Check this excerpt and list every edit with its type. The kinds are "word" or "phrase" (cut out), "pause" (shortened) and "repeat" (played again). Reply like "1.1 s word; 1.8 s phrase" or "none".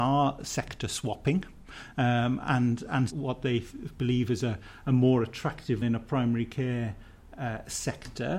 3.1 s phrase; 5.8 s word